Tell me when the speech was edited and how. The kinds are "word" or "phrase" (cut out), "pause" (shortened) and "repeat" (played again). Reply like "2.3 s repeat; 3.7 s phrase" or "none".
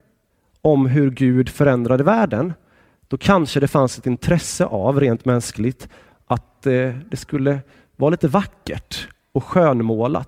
none